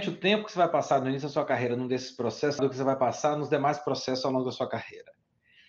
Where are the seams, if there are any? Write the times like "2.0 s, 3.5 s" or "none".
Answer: 2.6 s